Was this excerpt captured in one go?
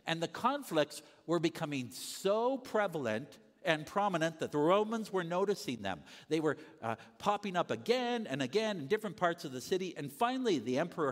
yes; 0 cuts

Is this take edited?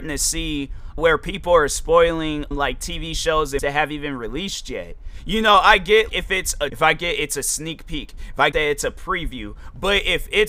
yes; 6 cuts; at 1.0 s, 2.5 s, 3.6 s, 6.1 s, 6.7 s, 8.5 s

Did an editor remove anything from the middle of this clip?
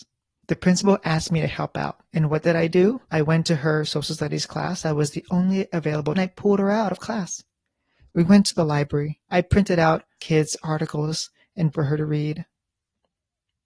yes; 6 cuts; at 2.0 s, 3.1 s, 6.1 s, 9.3 s, 10.2 s, 11.7 s

